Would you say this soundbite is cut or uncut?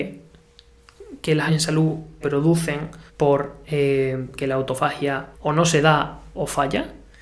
cut